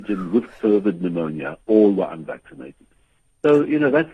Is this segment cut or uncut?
uncut